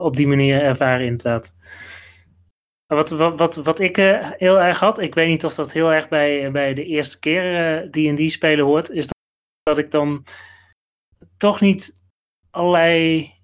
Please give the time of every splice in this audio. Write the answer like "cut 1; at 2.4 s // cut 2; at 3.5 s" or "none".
none